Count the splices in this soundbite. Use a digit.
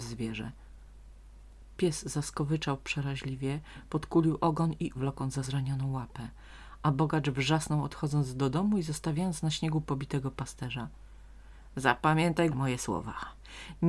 3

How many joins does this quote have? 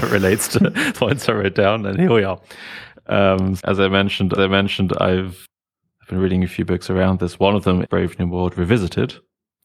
4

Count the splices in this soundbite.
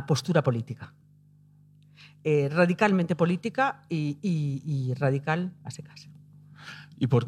0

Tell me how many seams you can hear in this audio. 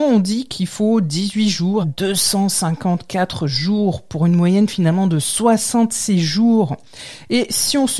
1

